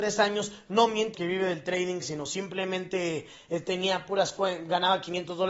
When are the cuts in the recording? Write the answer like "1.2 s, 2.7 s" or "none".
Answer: 1.1 s